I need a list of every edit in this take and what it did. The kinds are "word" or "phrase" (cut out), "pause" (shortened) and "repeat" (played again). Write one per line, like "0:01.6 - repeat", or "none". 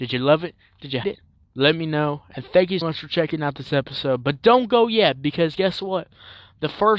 0:01.0 - word
0:01.3 - pause
0:02.8 - word